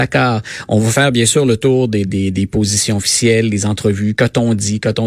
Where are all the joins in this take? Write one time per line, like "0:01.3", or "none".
none